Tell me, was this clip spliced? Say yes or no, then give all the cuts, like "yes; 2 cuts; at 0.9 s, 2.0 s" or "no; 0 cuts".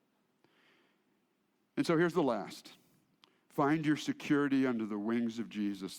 no; 0 cuts